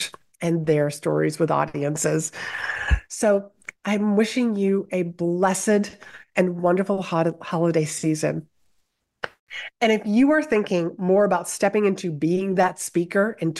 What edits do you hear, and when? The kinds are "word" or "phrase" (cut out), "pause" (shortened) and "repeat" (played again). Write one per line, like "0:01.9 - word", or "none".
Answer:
none